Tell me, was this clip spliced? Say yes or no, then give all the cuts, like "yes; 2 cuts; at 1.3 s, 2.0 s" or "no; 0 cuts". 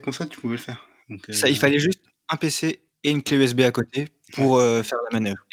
no; 0 cuts